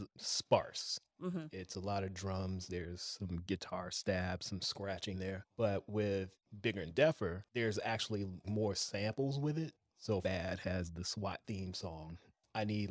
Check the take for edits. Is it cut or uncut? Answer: cut